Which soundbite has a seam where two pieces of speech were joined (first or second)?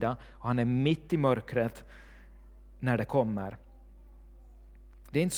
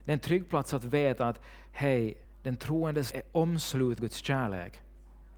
second